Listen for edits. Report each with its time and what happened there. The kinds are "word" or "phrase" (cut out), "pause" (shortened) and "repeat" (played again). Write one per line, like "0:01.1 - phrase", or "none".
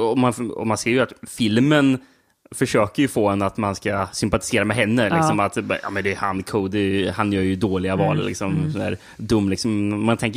none